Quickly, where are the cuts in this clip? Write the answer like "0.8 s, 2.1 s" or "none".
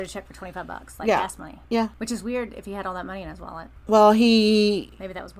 1.6 s